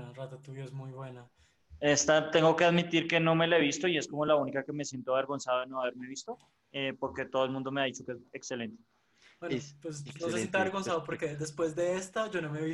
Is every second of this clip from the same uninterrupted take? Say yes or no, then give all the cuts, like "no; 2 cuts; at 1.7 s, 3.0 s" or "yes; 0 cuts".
yes; 0 cuts